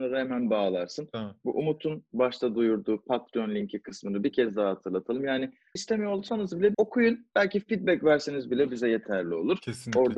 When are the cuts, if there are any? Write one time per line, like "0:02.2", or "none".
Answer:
0:05.8
0:06.7